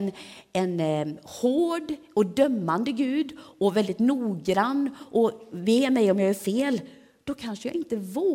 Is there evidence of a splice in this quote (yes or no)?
no